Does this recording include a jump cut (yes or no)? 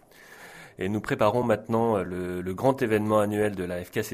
no